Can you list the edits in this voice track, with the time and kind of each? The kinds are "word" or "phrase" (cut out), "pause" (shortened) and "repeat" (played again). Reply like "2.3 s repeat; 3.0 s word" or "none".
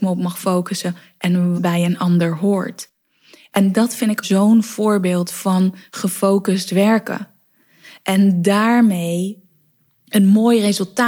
1.5 s word; 4.2 s phrase